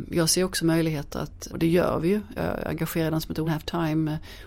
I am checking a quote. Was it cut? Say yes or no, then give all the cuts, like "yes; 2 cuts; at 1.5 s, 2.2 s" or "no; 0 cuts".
yes; 3 cuts; at 1.5 s, 2.4 s, 3.4 s